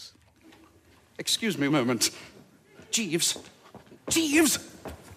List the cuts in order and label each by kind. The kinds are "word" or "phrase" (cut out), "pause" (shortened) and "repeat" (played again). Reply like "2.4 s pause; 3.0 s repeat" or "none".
1.7 s word